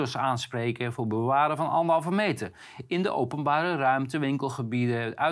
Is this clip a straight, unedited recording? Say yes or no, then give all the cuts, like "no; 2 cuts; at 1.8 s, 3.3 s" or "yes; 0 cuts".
yes; 0 cuts